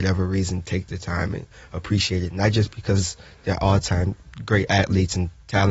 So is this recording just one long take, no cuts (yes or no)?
yes